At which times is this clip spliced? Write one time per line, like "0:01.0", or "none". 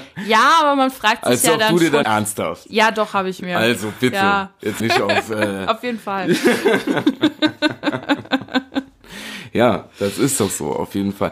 0:02.0
0:04.8